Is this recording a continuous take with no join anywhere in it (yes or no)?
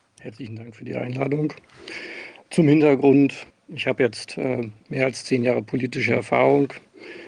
no